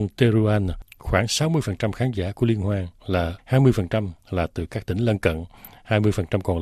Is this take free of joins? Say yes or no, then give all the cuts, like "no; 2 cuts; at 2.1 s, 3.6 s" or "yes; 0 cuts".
no; 1 cut; at 3.4 s